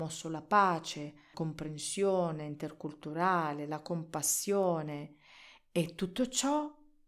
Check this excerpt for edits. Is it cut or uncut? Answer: cut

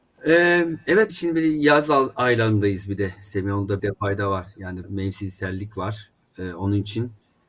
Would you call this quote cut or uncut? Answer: cut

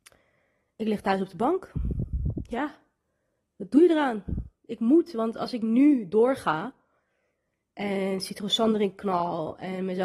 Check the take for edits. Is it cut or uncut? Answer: uncut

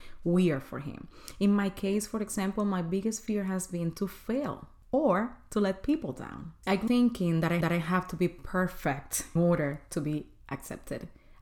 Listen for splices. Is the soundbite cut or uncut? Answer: cut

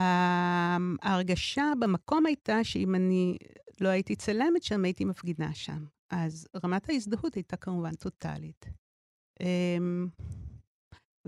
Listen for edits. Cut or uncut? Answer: uncut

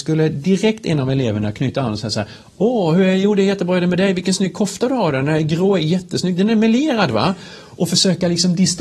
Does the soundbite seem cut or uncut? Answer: uncut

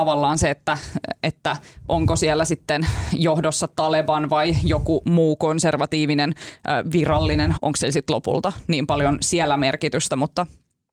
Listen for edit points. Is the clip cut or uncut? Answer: cut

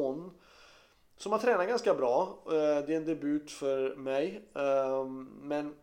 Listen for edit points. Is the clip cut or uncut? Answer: uncut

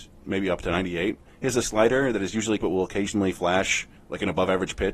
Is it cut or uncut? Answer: cut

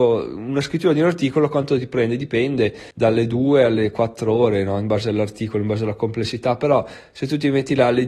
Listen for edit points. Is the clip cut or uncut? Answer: cut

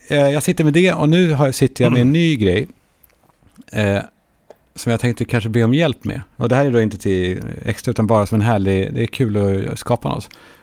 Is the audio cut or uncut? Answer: uncut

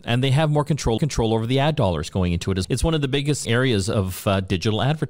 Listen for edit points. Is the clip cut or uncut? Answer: cut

